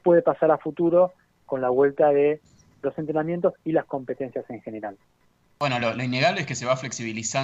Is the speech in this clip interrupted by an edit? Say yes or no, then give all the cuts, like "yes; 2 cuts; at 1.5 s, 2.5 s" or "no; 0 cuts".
no; 0 cuts